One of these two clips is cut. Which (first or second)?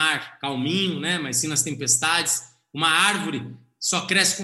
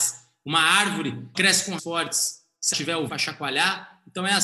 second